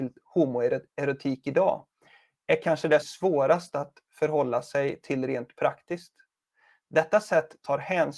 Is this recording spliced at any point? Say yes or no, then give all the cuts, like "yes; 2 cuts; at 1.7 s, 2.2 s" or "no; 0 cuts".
yes; 1 cut; at 3.0 s